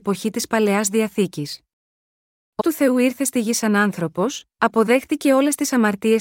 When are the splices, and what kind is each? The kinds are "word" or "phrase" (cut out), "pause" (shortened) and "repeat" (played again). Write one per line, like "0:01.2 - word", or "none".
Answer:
0:02.6 - word